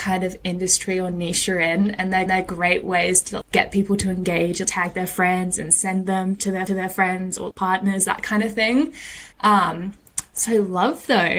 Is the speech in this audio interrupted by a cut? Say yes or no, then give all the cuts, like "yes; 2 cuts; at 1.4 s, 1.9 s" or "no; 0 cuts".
yes; 6 cuts; at 2.3 s, 3.4 s, 4.6 s, 6.7 s, 7.5 s, 9.3 s